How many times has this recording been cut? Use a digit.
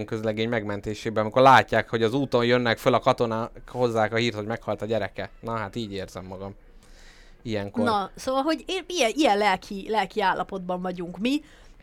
0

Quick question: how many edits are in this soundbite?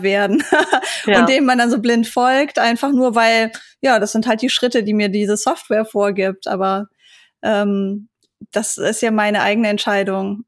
0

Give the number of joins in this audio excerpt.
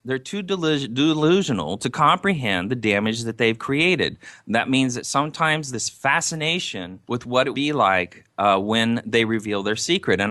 3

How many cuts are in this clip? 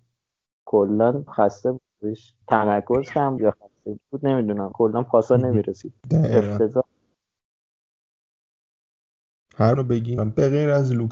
8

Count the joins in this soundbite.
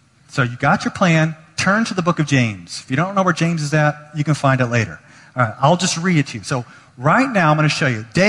0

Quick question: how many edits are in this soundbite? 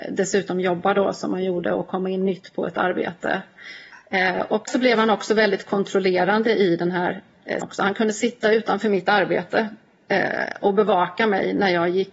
2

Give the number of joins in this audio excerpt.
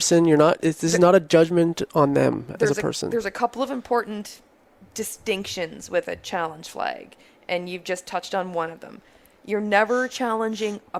0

